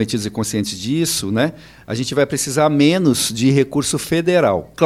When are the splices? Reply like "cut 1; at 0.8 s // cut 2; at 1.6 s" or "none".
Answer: none